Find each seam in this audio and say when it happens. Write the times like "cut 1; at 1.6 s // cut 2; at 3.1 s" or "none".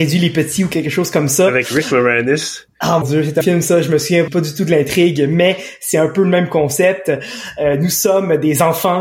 cut 1; at 3.0 s // cut 2; at 3.4 s // cut 3; at 4.3 s